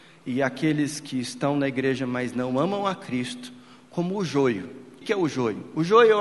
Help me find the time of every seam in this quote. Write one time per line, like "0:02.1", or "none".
0:05.0